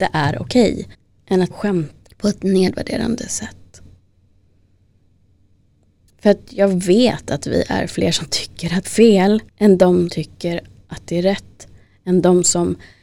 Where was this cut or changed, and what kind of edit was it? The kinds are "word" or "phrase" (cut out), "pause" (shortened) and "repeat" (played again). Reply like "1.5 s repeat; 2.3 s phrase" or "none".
0.9 s pause; 1.5 s word; 2.1 s phrase; 8.8 s phrase; 9.5 s pause; 10.1 s word